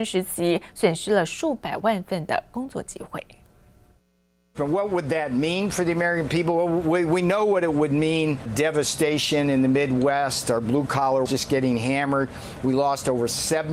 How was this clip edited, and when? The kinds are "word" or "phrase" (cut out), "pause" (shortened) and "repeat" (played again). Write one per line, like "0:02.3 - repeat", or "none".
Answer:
0:08.5 - word
0:11.3 - word

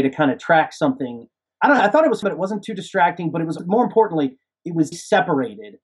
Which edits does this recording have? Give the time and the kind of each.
0:01.5 - word
0:02.2 - word
0:03.6 - word
0:04.9 - word

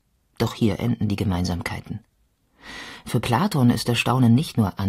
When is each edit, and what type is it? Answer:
none

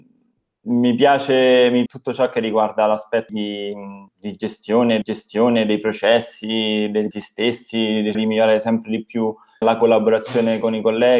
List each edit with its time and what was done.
0:01.9 - word
0:03.3 - word
0:04.1 - pause
0:05.0 - repeat
0:07.1 - word
0:08.1 - word
0:09.6 - word

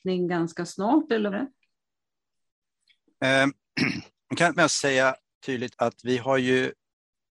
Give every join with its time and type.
0:01.3 - word
0:04.6 - word
0:05.7 - word

